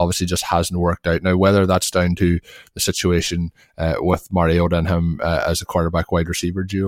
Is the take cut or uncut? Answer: uncut